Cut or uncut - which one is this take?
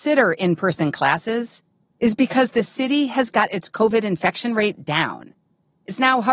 uncut